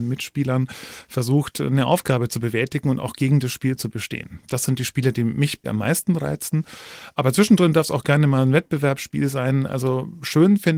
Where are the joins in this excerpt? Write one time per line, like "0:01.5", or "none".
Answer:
0:05.6

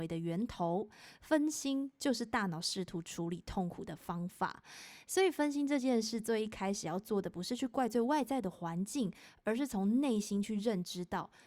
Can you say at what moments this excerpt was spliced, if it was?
none

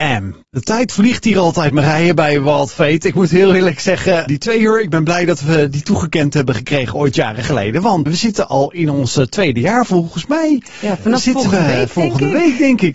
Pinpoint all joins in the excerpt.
0:04.3
0:08.1

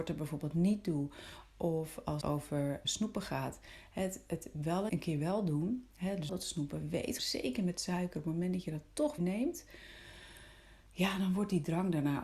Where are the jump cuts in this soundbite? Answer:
0:02.2
0:02.8
0:04.9
0:06.3
0:07.2
0:09.2

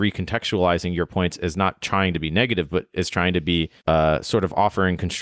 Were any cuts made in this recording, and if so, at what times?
0:03.8

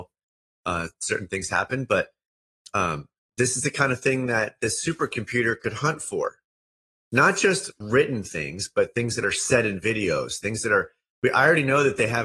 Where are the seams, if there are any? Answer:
none

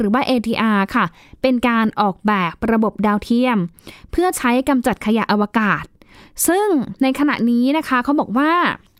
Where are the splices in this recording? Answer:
none

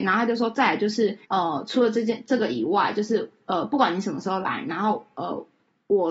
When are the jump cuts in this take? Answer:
0:01.2

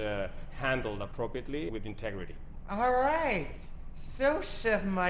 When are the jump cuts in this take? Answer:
0:01.7

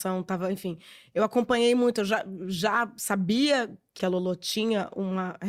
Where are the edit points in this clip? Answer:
0:04.0

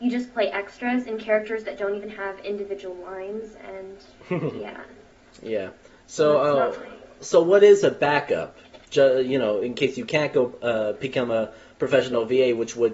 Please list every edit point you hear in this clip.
none

